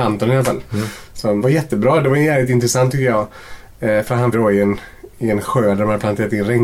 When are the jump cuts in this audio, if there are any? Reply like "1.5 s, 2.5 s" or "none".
1.4 s, 4.3 s